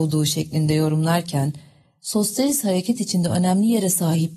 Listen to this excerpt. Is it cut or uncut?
uncut